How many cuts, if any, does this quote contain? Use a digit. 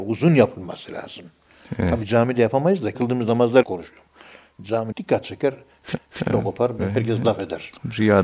5